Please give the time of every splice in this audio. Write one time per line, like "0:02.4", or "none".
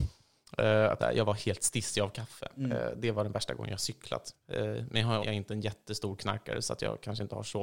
0:01.0
0:05.2